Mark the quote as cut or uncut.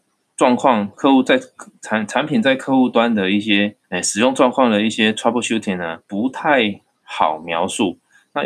cut